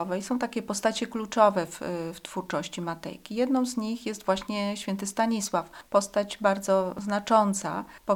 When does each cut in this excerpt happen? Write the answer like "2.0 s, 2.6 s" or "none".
none

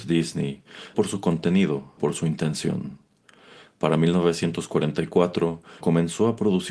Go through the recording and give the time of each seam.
0.9 s, 2.0 s, 5.8 s

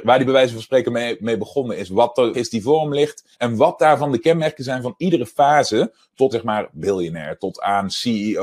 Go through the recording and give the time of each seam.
2.3 s, 3.3 s, 6.3 s

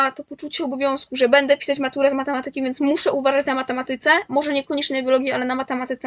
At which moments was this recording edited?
none

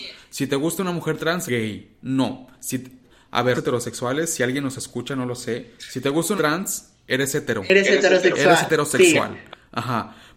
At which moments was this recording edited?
1.5 s, 3.5 s, 6.4 s

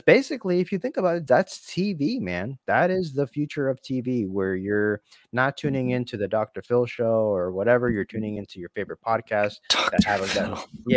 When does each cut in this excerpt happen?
none

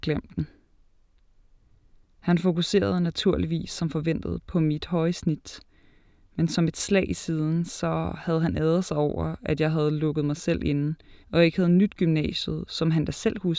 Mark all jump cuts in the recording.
11.2 s

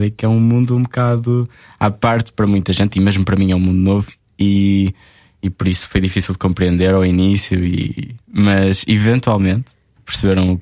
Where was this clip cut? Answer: none

